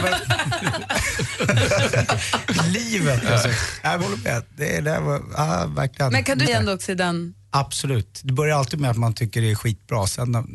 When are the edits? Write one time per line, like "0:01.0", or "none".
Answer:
0:02.6
0:04.0
0:06.5